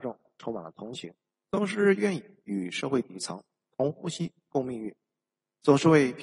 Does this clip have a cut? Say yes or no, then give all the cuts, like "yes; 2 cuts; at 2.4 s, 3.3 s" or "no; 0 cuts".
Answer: yes; 1 cut; at 1.3 s